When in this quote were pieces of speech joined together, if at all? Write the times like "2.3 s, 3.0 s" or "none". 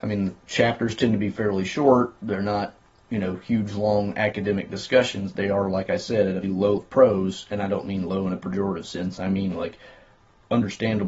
6.4 s, 6.8 s